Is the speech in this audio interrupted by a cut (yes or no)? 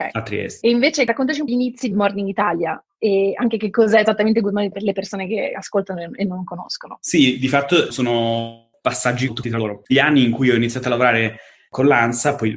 yes